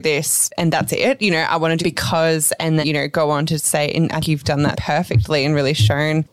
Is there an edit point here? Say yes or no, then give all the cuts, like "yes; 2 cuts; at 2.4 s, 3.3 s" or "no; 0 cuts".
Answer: yes; 4 cuts; at 1.8 s, 2.8 s, 4.2 s, 4.7 s